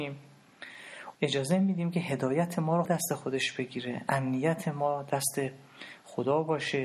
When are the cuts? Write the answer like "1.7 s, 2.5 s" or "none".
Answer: 1.1 s, 2.8 s

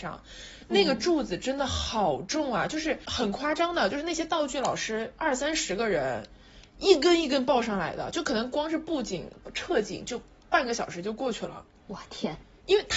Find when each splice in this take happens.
none

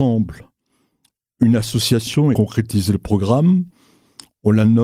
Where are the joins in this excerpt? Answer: 2.3 s

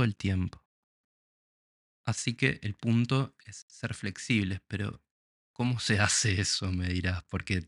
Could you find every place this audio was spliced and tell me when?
none

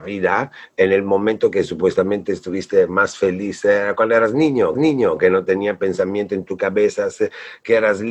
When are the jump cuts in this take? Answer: 4.7 s

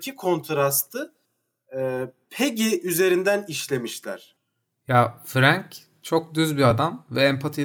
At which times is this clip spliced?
none

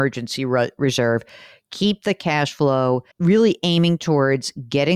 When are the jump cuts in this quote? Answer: 3.1 s

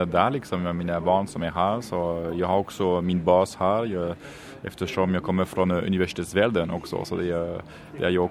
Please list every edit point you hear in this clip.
1.3 s

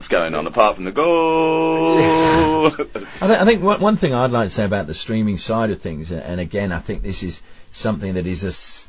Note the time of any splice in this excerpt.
none

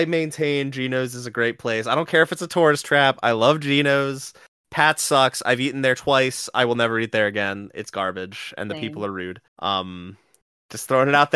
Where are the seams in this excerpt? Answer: 9.5 s

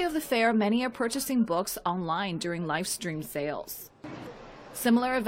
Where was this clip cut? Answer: none

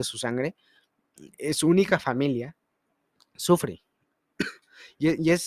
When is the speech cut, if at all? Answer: none

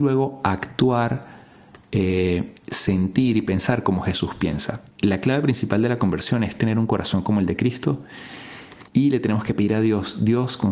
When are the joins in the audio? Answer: 4.9 s, 8.9 s

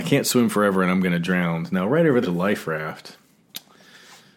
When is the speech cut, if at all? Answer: 2.2 s

